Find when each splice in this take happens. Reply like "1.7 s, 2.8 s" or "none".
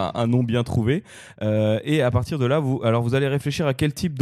none